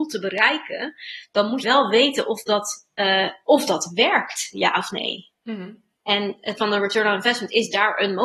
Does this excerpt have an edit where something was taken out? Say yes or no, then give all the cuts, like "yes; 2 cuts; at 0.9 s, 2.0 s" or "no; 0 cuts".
yes; 2 cuts; at 1.6 s, 6.6 s